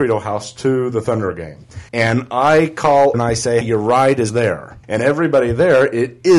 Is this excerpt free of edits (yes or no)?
no